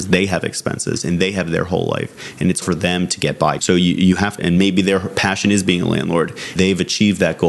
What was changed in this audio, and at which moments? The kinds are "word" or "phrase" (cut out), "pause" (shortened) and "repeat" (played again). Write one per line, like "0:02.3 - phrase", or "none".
0:02.6 - word
0:03.6 - word
0:04.4 - word
0:06.6 - word